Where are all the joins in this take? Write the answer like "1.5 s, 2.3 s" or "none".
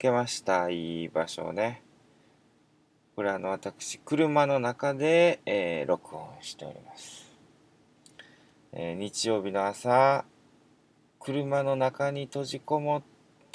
5.4 s